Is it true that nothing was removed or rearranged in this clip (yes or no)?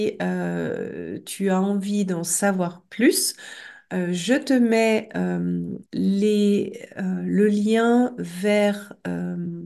no